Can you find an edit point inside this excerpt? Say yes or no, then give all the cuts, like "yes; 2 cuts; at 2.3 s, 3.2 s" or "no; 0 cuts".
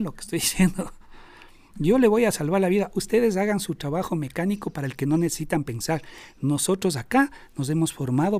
no; 0 cuts